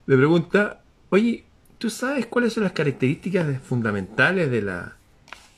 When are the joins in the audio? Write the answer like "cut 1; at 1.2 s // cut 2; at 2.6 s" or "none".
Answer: none